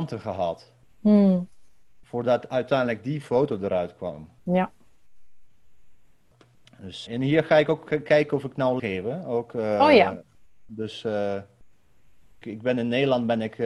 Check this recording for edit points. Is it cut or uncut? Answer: cut